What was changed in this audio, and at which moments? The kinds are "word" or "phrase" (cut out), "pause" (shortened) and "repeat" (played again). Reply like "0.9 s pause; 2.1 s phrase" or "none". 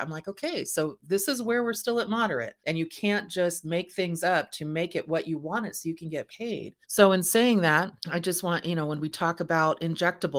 2.6 s pause; 6.8 s pause; 8.0 s pause

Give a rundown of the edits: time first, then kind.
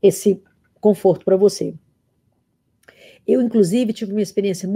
none

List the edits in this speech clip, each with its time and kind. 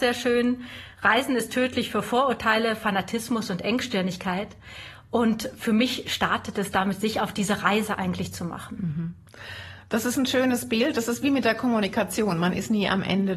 none

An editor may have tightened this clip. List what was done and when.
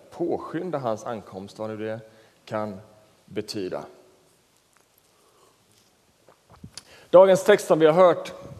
none

